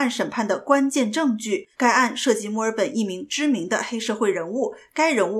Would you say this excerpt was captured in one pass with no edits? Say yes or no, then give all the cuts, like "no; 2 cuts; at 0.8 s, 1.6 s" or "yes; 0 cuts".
no; 1 cut; at 1.7 s